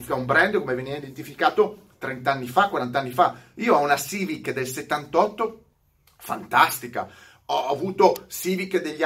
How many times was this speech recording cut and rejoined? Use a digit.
0